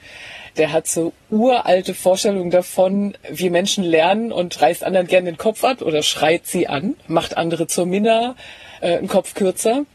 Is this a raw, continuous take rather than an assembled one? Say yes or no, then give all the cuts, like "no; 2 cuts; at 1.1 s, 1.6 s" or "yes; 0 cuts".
yes; 0 cuts